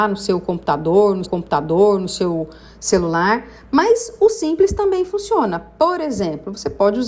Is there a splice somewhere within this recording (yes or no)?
yes